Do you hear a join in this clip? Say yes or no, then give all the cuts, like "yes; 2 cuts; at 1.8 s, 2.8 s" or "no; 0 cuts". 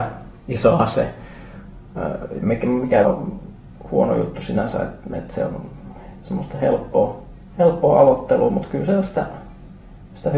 yes; 2 cuts; at 3.0 s, 7.4 s